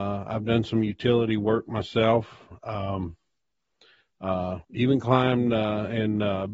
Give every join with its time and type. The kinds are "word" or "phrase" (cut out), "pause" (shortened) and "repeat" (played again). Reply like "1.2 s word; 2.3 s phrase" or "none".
4.6 s pause